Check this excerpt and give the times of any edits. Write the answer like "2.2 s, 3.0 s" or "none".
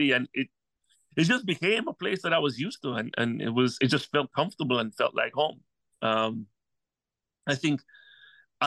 none